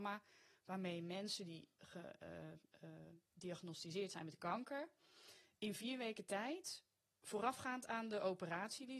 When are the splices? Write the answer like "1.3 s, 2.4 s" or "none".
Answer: none